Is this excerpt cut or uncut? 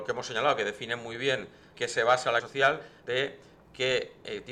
cut